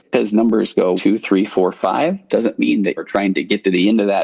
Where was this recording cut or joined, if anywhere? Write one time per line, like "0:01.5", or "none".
0:01.0
0:03.0